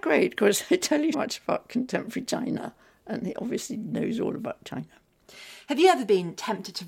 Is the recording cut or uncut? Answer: cut